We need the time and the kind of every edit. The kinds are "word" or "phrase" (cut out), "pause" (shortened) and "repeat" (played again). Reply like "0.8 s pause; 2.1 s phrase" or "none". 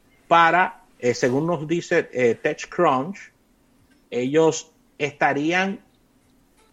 0.9 s pause